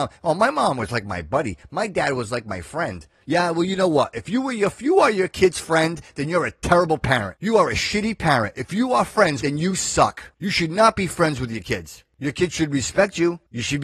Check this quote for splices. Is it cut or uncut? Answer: cut